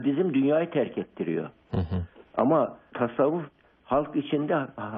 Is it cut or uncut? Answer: cut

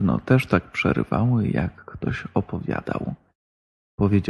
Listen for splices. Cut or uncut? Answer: uncut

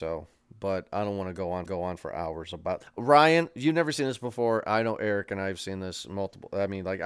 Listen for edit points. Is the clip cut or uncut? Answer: cut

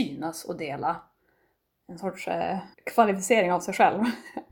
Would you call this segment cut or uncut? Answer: cut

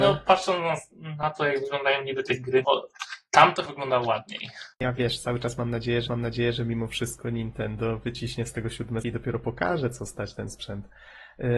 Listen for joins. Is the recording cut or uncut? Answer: cut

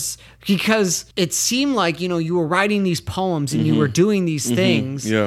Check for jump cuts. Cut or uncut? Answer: cut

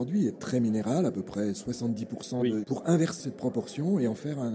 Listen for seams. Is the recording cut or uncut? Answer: cut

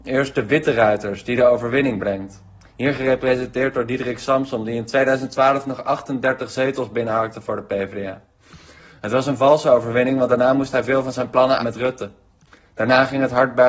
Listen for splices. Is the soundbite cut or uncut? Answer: cut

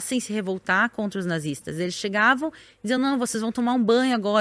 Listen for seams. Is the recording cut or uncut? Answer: uncut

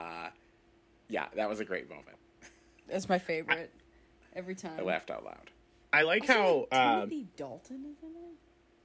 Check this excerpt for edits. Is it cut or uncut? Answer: uncut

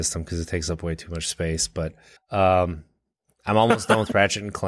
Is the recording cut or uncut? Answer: cut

